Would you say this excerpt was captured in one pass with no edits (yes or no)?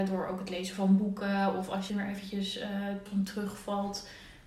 no